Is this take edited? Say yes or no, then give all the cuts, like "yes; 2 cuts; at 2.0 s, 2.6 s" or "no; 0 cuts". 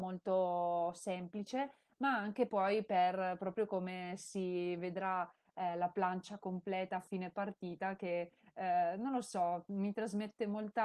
no; 0 cuts